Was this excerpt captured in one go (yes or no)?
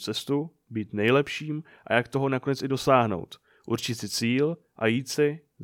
yes